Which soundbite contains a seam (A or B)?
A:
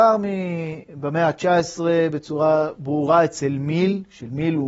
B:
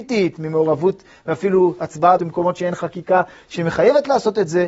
B